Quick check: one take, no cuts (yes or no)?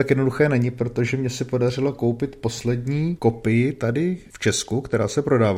yes